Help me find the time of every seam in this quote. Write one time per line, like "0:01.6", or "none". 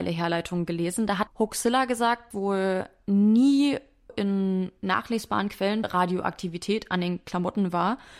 0:01.3
0:02.3
0:04.1
0:05.8

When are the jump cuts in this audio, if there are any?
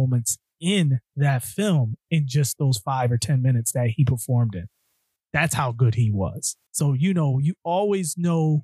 0:06.7

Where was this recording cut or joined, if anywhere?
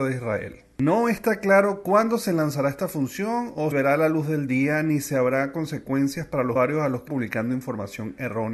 0:03.7
0:06.6
0:07.1

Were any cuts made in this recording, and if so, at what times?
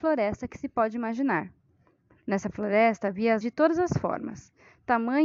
0:03.4

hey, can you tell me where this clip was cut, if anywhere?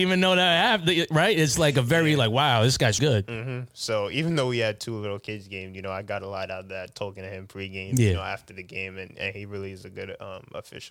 0:03.0

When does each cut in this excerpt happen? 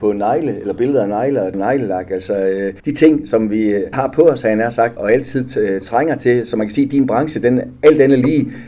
0:01.5
0:02.8
0:03.9
0:05.0

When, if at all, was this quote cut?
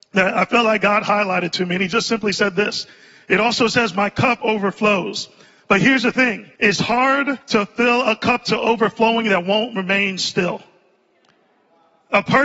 0:06.5
0:07.4

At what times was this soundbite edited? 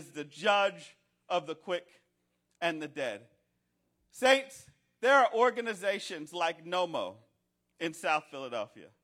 none

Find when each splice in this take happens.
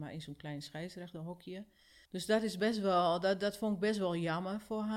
0:02.1

